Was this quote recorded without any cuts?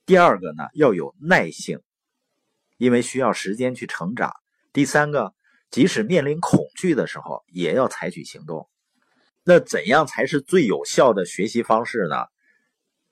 yes; 0 cuts

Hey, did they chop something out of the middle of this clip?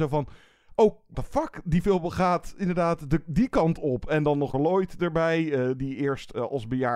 yes; 2 cuts; at 1.1 s, 4.5 s

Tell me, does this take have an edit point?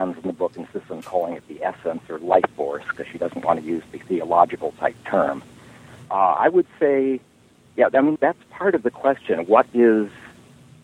yes; 1 cut; at 8.2 s

